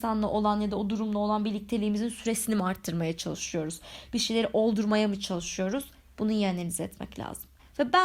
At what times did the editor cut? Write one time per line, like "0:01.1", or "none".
none